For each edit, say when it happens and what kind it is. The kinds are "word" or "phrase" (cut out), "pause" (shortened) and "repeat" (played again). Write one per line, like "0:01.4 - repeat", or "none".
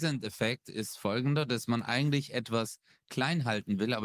none